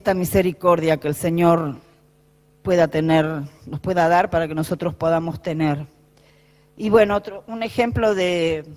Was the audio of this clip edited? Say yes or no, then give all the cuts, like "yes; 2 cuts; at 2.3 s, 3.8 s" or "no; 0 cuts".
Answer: no; 0 cuts